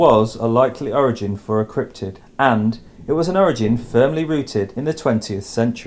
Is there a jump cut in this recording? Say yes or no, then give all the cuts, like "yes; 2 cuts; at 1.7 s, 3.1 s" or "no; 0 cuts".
no; 0 cuts